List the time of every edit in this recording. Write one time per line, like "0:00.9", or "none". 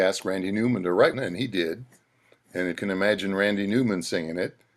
0:01.1
0:02.8